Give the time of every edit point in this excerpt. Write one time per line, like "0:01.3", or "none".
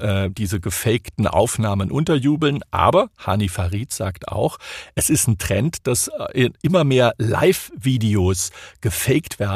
none